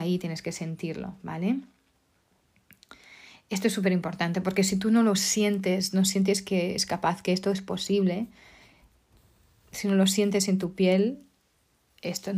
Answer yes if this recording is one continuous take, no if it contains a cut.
yes